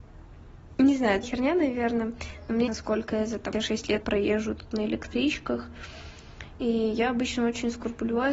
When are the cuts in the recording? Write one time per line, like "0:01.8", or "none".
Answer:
0:01.2
0:02.7
0:03.5
0:04.0